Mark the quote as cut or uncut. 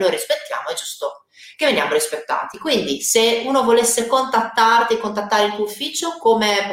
uncut